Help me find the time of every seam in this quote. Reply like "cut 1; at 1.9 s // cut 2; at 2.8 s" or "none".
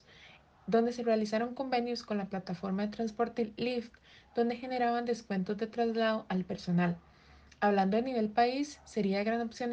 none